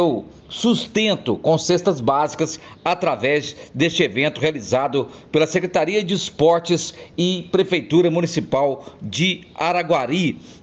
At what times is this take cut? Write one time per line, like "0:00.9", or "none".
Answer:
none